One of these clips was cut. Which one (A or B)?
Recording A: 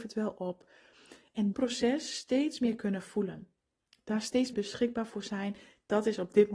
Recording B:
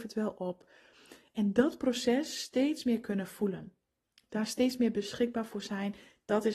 A